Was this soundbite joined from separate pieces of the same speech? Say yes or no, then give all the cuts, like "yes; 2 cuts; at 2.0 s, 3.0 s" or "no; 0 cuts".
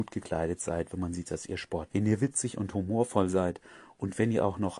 yes; 1 cut; at 1.9 s